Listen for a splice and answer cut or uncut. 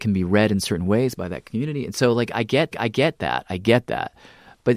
cut